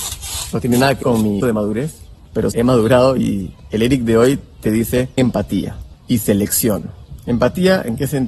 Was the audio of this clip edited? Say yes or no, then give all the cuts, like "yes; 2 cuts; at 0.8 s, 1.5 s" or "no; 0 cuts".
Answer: yes; 4 cuts; at 1.0 s, 1.4 s, 2.5 s, 5.2 s